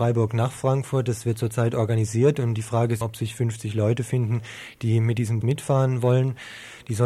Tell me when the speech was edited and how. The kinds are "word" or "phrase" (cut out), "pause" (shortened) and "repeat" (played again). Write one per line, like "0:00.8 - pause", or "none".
0:03.0 - word
0:05.4 - word